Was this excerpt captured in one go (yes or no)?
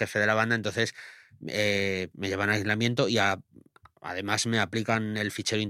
no